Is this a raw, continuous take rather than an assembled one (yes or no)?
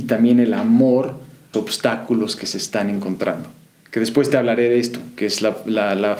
no